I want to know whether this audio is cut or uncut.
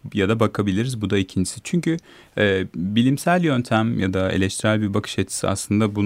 uncut